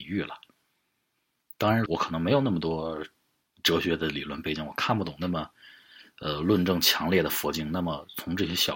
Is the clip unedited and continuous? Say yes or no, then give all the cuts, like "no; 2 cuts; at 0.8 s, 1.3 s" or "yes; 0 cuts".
no; 1 cut; at 1.9 s